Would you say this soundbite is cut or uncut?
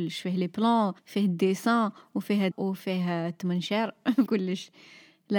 cut